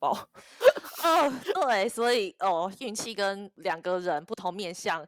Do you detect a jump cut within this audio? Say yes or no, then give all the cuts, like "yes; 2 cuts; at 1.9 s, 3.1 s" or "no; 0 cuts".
no; 0 cuts